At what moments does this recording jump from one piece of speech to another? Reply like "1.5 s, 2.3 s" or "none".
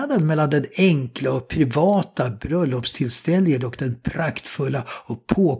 none